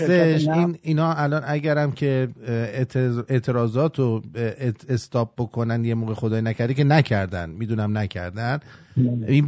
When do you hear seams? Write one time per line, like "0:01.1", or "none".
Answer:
none